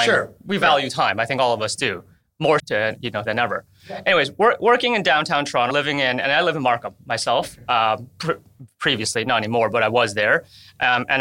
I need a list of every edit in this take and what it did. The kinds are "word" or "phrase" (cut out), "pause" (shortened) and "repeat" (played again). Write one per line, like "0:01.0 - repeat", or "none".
0:02.6 - word
0:03.2 - word
0:05.7 - word